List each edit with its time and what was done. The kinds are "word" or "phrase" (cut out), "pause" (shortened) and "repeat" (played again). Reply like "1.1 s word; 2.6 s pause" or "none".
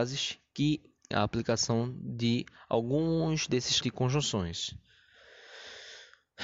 1.1 s word; 3.8 s word